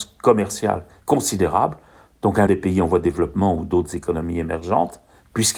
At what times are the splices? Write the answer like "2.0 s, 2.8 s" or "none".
1.0 s, 2.5 s